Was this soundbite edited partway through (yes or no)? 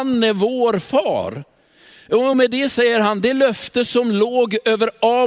no